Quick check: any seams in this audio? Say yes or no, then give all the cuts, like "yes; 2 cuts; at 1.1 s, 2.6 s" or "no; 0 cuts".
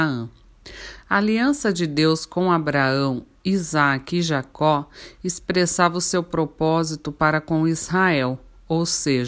no; 0 cuts